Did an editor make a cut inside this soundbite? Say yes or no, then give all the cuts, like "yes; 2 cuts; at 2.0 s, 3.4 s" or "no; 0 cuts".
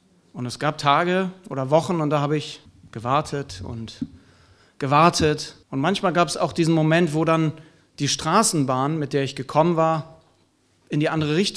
yes; 2 cuts; at 2.7 s, 5.6 s